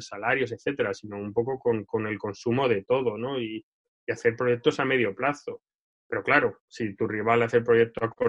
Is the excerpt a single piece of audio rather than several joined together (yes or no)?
yes